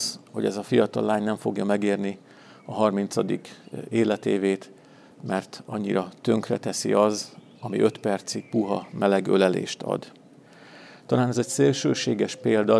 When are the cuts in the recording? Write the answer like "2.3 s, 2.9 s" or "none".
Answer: none